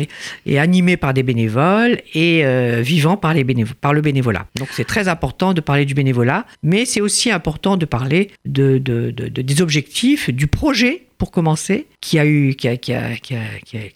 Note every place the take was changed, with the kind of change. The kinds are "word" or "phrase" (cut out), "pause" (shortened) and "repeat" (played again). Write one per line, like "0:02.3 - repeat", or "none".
0:04.5 - pause
0:06.5 - pause
0:08.4 - pause
0:12.0 - pause